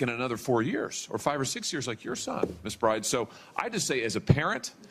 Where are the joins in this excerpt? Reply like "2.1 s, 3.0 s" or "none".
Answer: none